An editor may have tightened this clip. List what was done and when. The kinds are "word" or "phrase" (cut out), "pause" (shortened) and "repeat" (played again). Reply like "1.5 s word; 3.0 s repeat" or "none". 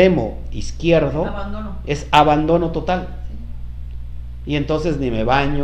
none